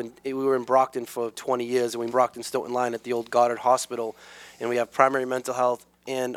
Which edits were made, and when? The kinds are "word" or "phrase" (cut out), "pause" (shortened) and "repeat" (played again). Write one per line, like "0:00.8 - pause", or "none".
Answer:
0:01.3 - word
0:02.1 - phrase